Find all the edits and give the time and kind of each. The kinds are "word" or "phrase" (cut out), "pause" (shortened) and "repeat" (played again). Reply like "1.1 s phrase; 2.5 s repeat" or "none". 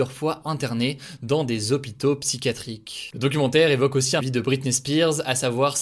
4.2 s phrase